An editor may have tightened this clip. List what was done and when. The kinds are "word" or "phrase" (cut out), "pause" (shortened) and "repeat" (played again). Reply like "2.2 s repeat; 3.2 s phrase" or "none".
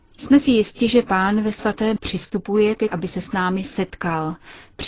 2.0 s word; 2.9 s phrase